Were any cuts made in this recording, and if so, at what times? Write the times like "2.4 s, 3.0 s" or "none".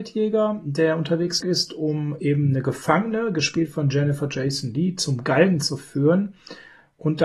1.4 s

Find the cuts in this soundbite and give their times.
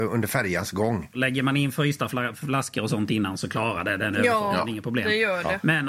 none

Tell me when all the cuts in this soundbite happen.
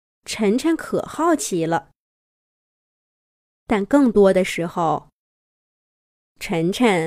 none

